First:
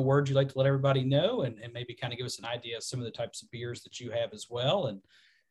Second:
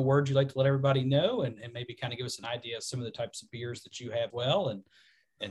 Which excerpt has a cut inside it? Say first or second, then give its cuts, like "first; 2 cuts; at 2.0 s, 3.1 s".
second; 1 cut; at 4.3 s